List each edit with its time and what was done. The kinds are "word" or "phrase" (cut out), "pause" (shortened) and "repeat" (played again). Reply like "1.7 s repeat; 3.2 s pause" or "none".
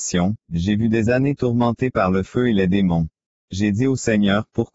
1.1 s word; 3.3 s pause